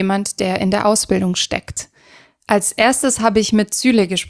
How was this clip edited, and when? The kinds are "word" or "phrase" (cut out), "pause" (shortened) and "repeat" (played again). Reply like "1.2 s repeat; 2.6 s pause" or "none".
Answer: none